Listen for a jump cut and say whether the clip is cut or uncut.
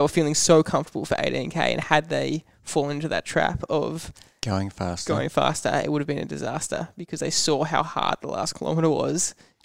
uncut